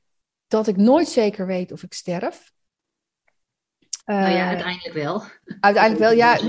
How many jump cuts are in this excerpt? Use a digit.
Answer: 1